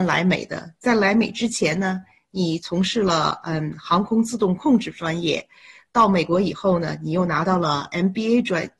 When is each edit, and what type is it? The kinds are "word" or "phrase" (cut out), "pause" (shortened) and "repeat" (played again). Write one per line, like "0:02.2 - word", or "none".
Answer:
none